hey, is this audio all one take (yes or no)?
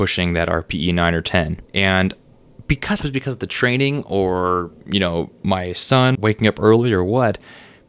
no